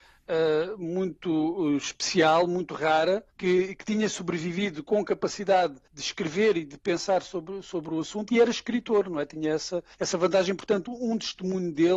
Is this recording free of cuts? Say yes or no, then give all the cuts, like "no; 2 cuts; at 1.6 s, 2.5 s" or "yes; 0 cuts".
no; 3 cuts; at 3.3 s, 5.8 s, 9.9 s